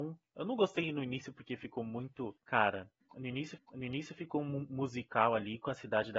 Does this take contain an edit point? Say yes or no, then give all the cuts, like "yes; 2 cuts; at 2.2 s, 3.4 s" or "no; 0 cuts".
yes; 2 cuts; at 2.4 s, 3.6 s